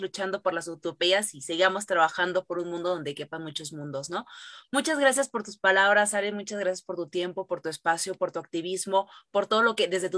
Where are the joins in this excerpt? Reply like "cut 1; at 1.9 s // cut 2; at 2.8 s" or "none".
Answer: none